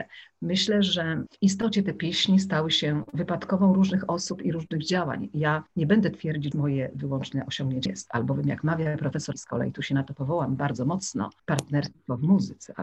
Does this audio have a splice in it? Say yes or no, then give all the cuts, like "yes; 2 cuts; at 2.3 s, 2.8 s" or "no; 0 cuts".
yes; 4 cuts; at 5.7 s, 6.5 s, 7.9 s, 9.3 s